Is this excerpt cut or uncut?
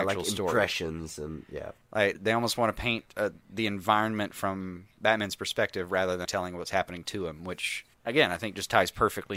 cut